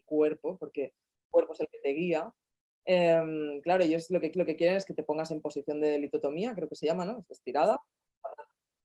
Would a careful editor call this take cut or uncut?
cut